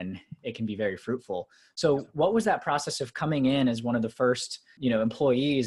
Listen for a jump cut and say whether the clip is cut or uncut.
uncut